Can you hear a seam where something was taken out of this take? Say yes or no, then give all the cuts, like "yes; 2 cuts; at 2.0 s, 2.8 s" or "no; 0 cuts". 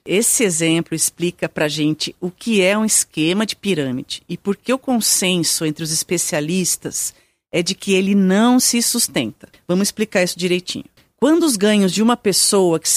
no; 0 cuts